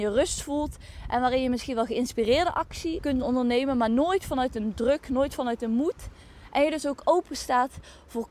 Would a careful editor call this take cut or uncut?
cut